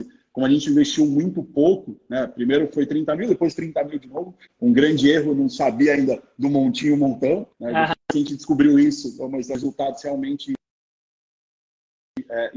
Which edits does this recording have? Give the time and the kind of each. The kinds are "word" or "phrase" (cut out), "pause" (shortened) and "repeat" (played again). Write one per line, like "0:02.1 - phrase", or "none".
0:07.5 - pause

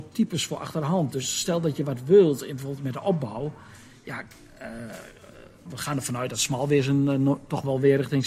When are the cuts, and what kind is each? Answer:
0:05.7 - word

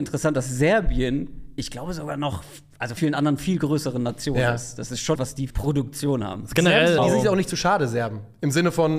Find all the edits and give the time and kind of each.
0:03.0 - phrase
0:05.1 - word
0:05.5 - word
0:07.0 - word

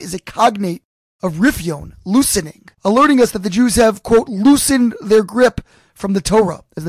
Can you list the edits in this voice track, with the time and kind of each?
0:02.7 - pause

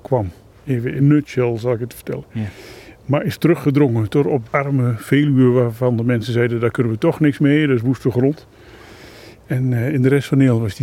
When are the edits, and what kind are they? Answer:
0:01.0 - word
0:04.5 - word

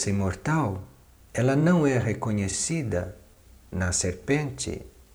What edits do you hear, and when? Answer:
none

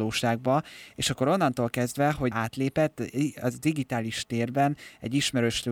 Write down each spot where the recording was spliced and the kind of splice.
0:02.3 - word

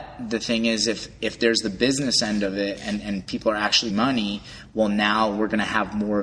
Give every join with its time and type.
0:03.9 - word

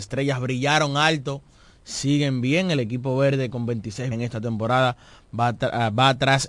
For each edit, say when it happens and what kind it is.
0:04.1 - word

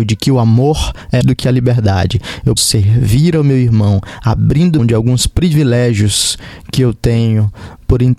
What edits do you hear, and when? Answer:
0:01.2 - phrase
0:02.6 - word
0:04.8 - word

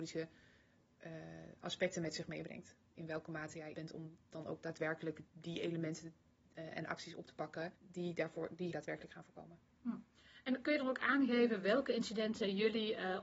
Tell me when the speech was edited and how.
0:03.7 - phrase
0:05.3 - pause
0:07.8 - pause
0:08.7 - word

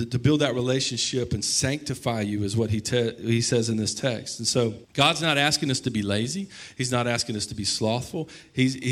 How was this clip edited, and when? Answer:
0:04.8 - pause

